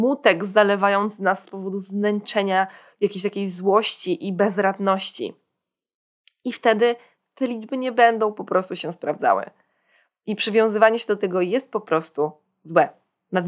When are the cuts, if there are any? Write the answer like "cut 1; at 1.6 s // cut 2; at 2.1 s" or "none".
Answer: none